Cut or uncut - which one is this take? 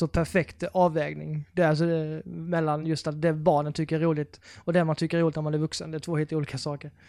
uncut